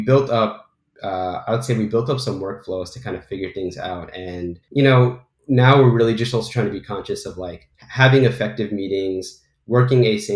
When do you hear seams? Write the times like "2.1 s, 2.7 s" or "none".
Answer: 4.6 s, 7.7 s